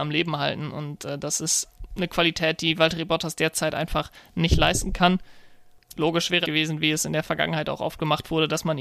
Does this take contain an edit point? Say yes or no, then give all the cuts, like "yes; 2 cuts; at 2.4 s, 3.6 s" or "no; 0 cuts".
yes; 1 cut; at 6.4 s